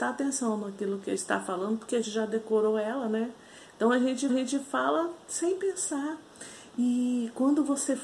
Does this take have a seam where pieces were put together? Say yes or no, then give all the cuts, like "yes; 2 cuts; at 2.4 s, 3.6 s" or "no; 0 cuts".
yes; 3 cuts; at 1.2 s, 2.0 s, 4.3 s